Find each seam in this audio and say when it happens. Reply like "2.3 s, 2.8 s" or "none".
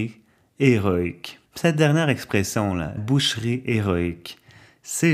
1.5 s, 3.0 s